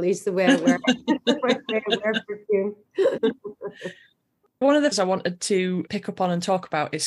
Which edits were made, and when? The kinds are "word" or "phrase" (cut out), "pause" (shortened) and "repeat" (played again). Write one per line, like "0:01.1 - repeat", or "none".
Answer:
0:03.2 - word
0:04.6 - word
0:04.9 - word
0:05.9 - word